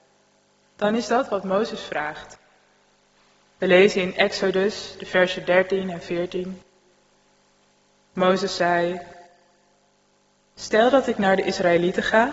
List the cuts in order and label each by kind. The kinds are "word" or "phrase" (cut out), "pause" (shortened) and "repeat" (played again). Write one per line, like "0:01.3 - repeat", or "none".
none